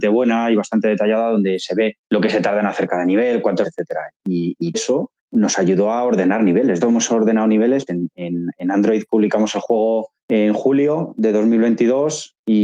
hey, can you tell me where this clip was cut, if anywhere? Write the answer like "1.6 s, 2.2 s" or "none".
2.0 s, 3.6 s, 4.7 s, 5.2 s, 6.8 s, 7.9 s, 10.2 s